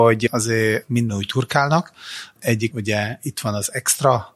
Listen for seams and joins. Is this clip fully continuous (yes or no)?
no